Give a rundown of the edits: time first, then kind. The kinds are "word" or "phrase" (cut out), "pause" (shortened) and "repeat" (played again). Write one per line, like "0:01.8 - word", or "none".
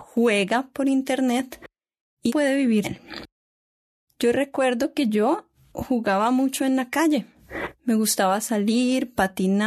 0:02.3 - word
0:02.8 - word